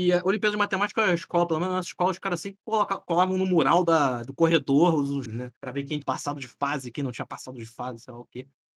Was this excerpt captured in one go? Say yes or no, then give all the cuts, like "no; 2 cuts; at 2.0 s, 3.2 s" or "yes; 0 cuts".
no; 3 cuts; at 5.3 s, 5.6 s, 6.0 s